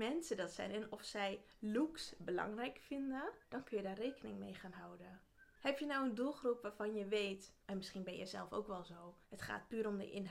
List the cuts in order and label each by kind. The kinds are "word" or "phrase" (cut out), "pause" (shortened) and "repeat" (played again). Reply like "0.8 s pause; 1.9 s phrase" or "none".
3.4 s pause; 7.6 s pause; 9.2 s pause